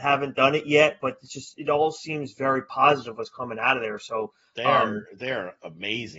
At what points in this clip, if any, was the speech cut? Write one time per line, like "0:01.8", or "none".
none